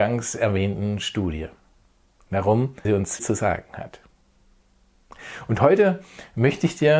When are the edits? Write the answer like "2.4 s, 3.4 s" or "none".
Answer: 2.8 s, 3.2 s

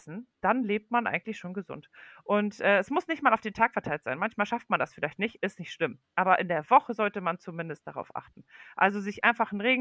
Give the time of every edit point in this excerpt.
none

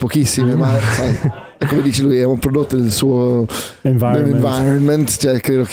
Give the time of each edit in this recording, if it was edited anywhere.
none

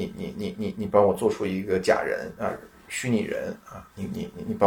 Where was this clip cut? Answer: none

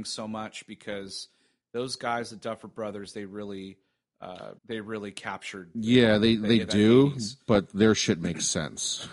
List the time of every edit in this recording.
4.6 s

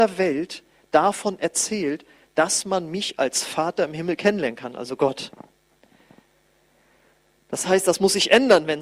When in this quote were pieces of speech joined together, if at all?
none

